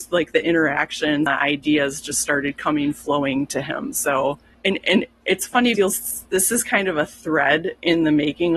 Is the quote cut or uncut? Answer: cut